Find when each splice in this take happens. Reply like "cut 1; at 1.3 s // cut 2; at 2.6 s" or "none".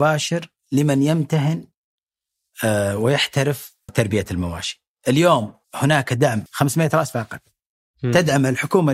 cut 1; at 3.9 s // cut 2; at 5.6 s // cut 3; at 6.5 s